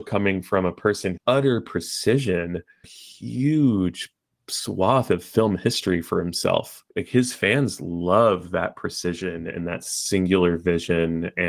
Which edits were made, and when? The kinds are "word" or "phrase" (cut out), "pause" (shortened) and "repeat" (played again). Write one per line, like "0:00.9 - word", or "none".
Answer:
0:01.2 - word
0:02.8 - phrase
0:06.9 - pause

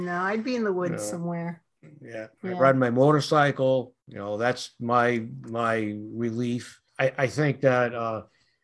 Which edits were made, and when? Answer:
0:02.3 - pause
0:04.0 - pause
0:06.9 - pause

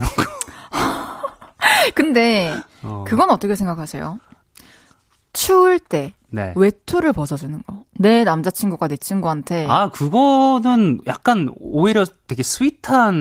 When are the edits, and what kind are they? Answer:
none

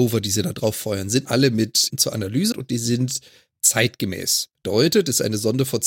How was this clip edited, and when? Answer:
0:01.3 - word
0:01.9 - word
0:02.5 - word

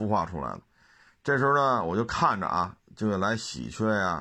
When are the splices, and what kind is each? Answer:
none

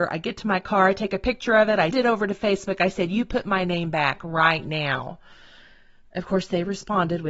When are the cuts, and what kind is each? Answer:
0:01.9 - word

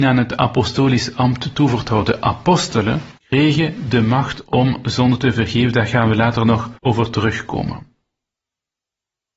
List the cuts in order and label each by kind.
0:03.2 - pause
0:06.8 - pause

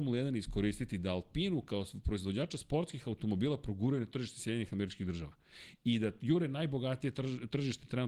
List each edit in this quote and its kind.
none

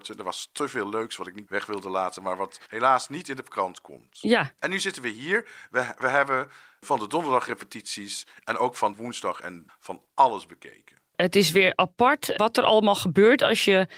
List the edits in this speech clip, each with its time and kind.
0:01.5 - word
0:02.6 - pause
0:04.6 - pause
0:08.9 - phrase
0:09.7 - word
0:12.4 - word

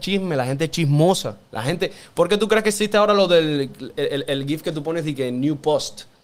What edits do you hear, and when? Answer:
0:01.5 - pause

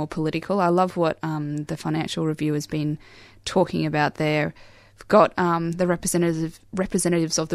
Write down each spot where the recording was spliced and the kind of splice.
none

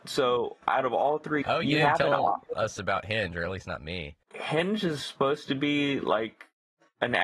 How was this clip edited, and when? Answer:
0:01.4 - word
0:04.2 - pause

